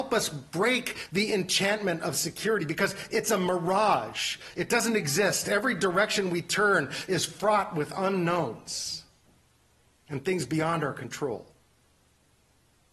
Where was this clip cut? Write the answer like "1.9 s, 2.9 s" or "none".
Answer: none